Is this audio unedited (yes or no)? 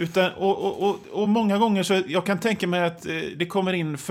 yes